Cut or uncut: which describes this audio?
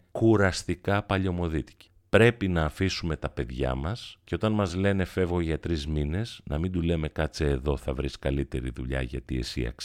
uncut